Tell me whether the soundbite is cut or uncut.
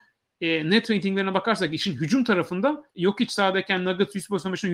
cut